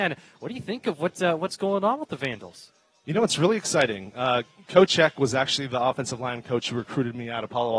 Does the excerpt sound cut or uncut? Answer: uncut